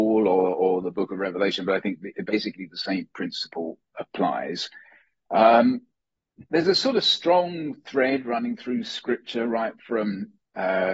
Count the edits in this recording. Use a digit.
1